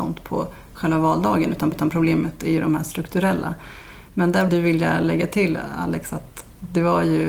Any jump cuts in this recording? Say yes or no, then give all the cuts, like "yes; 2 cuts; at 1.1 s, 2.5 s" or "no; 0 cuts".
yes; 2 cuts; at 1.7 s, 4.5 s